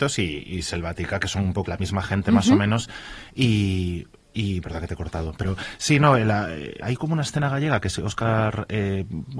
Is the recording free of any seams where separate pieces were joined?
no; 3 cuts; at 1.7 s, 4.6 s, 6.8 s

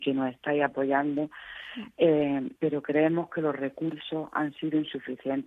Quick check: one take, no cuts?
no; 1 cut; at 2.6 s

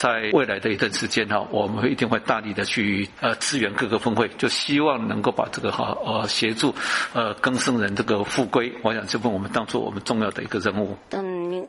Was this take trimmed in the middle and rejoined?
no; 0 cuts

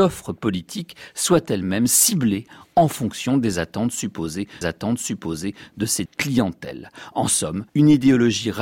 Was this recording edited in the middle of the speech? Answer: yes; 3 cuts; at 4.6 s, 6.1 s, 7.7 s

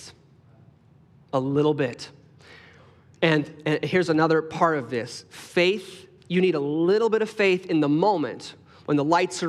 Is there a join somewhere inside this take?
no; 0 cuts

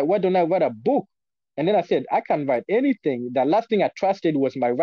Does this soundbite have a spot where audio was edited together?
no; 0 cuts

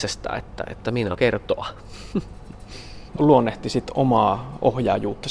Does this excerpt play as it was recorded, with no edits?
no; 2 cuts; at 1.1 s, 3.2 s

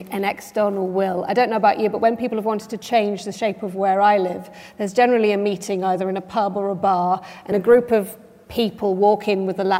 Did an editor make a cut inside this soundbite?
yes; 1 cut; at 7.5 s

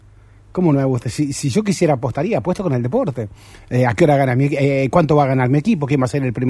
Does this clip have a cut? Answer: no; 0 cuts

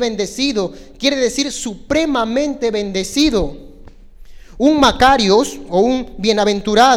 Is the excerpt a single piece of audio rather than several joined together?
yes; 0 cuts

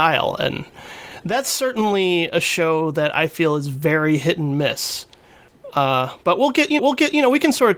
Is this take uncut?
no; 1 cut; at 6.8 s

